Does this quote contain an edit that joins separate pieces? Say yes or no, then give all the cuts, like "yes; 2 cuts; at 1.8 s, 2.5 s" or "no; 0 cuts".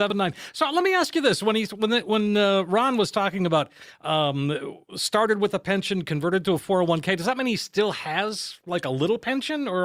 no; 0 cuts